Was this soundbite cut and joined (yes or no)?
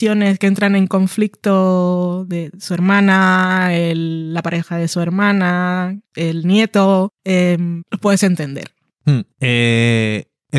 no